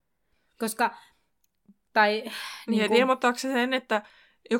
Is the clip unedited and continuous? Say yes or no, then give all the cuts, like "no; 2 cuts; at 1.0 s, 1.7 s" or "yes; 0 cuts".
yes; 0 cuts